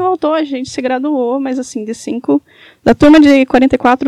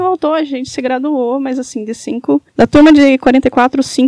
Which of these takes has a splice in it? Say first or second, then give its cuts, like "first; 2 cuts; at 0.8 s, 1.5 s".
second; 1 cut; at 2.5 s